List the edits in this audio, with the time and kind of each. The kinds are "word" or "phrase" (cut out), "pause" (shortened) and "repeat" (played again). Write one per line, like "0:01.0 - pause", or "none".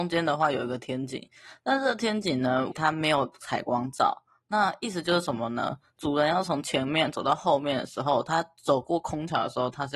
none